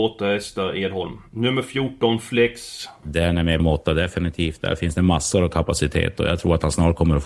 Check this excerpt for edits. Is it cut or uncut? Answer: cut